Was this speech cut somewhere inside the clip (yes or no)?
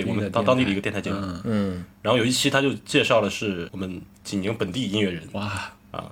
yes